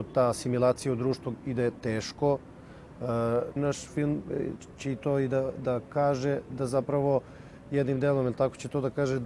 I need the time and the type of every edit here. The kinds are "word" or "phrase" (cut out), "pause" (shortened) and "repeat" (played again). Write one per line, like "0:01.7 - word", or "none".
0:03.6 - phrase